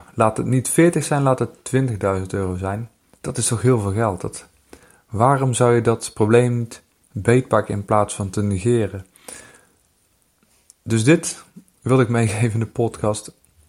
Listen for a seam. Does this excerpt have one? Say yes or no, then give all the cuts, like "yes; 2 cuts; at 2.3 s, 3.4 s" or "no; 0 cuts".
no; 0 cuts